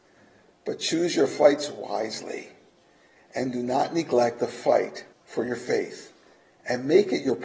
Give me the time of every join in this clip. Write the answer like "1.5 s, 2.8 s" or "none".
5.1 s

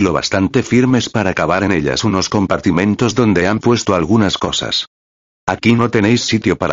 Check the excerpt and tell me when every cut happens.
none

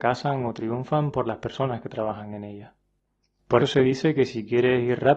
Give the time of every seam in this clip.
3.6 s

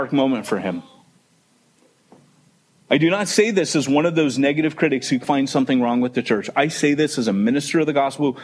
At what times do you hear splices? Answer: 5.2 s

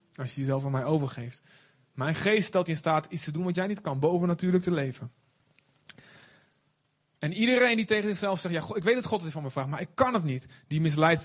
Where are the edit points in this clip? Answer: none

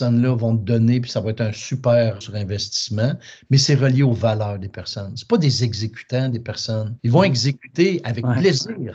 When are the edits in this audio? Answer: 2.2 s, 7.0 s

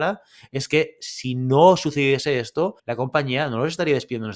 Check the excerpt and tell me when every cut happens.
2.8 s

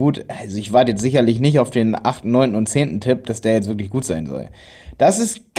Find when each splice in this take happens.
none

